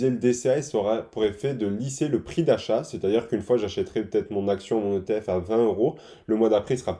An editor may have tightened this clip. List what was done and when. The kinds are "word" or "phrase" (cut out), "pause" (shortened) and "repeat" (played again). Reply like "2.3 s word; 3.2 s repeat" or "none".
none